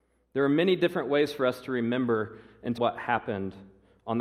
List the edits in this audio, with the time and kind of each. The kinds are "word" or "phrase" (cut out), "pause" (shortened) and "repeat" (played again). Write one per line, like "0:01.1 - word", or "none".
0:02.8 - phrase